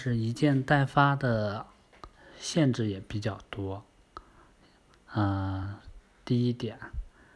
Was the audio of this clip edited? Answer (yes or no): no